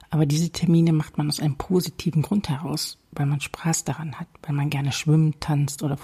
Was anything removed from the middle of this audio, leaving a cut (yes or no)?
no